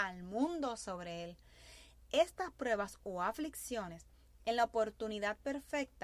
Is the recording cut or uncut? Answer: uncut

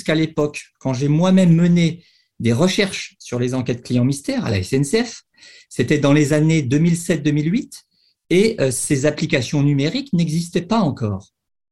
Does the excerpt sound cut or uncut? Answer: uncut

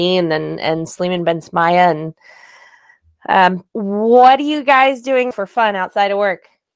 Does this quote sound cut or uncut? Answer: cut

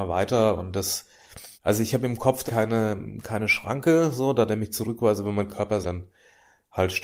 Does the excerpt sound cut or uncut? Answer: cut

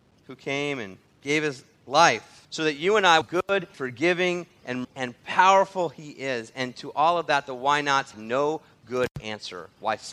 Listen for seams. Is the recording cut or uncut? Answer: cut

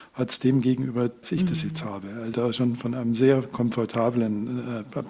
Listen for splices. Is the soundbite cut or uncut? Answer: cut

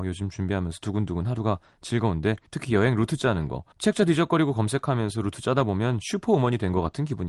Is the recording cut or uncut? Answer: cut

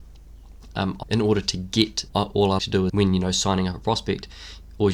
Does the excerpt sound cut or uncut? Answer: cut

